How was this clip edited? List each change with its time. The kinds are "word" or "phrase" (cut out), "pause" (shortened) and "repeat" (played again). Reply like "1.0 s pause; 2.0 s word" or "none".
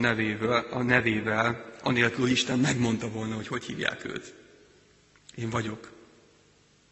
none